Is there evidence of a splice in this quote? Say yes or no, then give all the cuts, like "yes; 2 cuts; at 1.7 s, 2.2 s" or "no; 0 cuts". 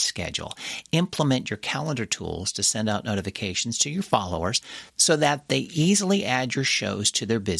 no; 0 cuts